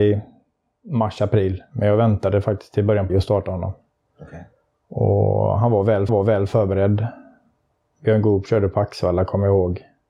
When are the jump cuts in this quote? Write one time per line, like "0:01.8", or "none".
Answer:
0:03.1
0:06.1